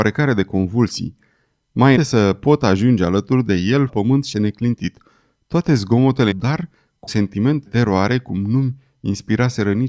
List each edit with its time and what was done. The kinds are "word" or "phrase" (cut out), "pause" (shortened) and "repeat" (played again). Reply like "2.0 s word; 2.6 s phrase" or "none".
2.0 s word; 3.9 s word; 4.3 s word; 6.3 s word; 7.1 s word; 7.7 s word